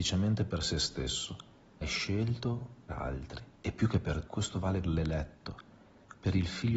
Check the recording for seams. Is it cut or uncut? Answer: cut